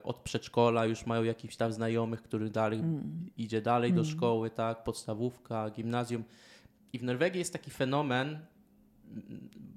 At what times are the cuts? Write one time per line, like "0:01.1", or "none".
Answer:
none